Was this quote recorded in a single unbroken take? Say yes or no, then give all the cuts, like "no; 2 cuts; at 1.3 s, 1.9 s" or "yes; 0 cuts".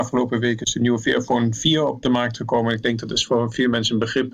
yes; 0 cuts